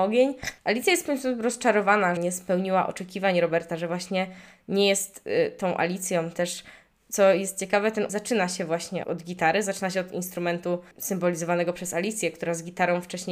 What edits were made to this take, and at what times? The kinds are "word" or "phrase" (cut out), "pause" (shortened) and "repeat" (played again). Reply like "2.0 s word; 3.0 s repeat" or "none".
2.2 s word; 8.1 s word; 9.0 s word